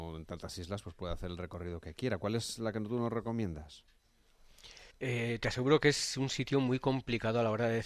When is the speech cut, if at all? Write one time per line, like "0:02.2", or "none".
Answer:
0:04.9